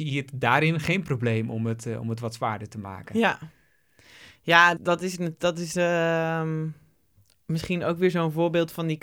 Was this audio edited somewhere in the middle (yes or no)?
yes